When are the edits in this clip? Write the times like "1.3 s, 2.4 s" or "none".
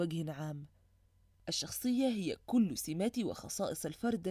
none